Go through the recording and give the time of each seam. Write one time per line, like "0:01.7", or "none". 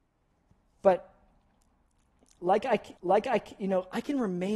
0:03.0